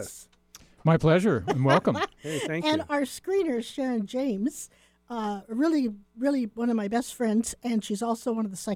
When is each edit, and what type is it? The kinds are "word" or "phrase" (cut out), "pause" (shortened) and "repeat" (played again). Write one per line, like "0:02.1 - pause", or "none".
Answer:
none